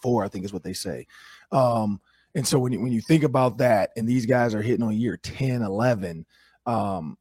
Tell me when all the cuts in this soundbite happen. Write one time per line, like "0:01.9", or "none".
none